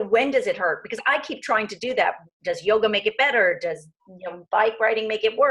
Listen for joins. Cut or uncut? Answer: uncut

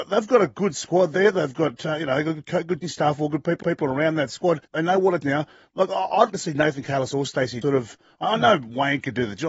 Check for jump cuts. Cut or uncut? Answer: cut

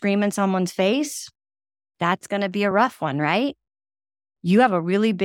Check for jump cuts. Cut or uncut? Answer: uncut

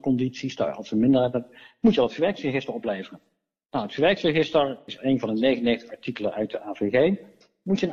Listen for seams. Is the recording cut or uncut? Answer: uncut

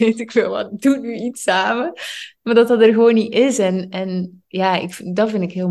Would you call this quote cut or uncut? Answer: uncut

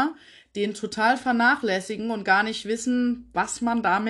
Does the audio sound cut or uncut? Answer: uncut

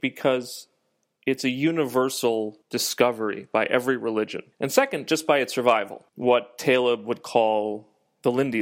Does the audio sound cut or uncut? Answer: cut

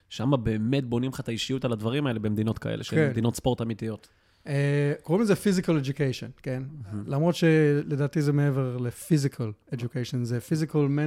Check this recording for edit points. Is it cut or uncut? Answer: uncut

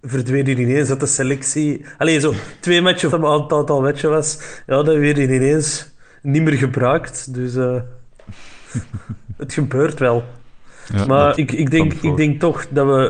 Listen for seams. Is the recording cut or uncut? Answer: cut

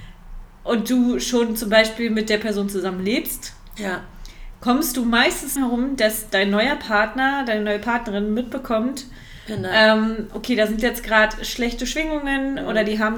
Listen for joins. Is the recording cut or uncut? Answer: cut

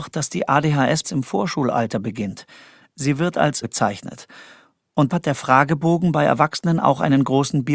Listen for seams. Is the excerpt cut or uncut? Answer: cut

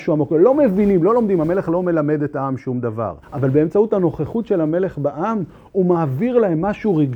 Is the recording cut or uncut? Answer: cut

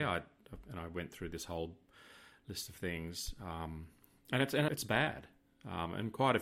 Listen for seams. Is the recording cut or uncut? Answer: cut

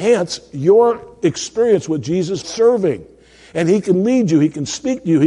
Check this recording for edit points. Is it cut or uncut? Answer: cut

